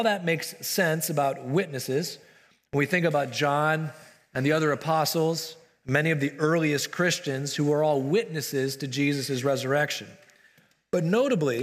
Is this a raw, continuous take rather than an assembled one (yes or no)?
yes